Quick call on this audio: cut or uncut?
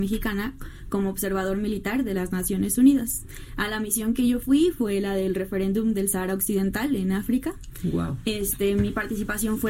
uncut